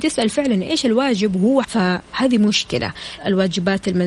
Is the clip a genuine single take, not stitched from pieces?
no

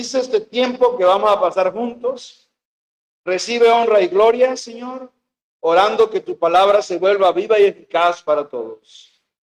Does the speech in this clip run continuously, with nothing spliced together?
yes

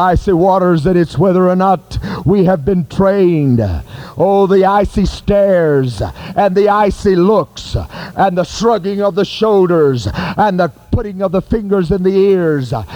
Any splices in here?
no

